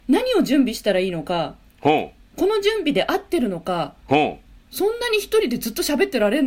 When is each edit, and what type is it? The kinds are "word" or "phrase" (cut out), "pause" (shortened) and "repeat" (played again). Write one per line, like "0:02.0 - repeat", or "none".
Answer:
none

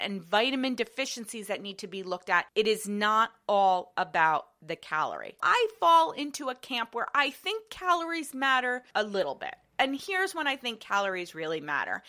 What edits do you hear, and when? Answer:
none

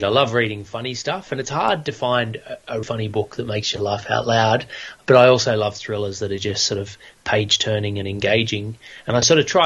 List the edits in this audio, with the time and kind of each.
0:02.8 - word

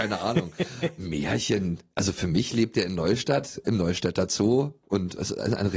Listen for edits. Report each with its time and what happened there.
none

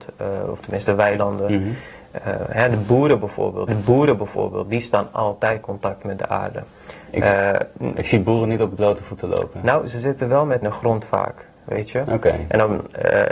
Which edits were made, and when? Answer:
0:03.7 - repeat
0:05.6 - word
0:10.6 - phrase

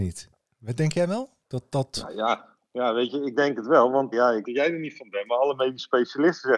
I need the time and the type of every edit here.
0:04.1 - word
0:04.4 - word

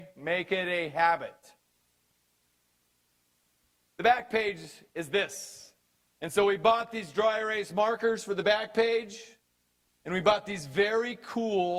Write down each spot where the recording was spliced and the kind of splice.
none

